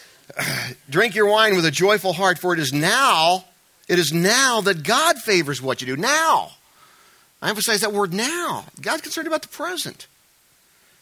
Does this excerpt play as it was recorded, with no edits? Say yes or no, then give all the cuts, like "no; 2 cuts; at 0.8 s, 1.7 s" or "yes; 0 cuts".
yes; 0 cuts